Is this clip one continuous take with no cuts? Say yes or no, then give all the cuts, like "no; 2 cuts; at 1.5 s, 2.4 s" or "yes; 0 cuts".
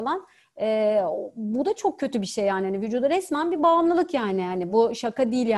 yes; 0 cuts